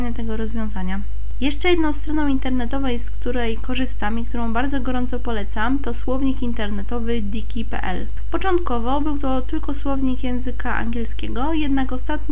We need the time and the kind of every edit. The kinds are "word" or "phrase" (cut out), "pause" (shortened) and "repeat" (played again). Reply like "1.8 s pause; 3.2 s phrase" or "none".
none